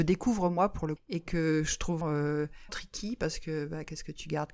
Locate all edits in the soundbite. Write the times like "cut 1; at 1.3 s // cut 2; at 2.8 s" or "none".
cut 1; at 1.0 s // cut 2; at 2.0 s // cut 3; at 2.7 s